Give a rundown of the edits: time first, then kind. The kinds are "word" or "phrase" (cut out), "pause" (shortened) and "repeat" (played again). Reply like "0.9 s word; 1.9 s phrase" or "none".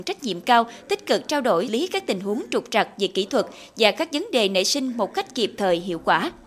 1.7 s word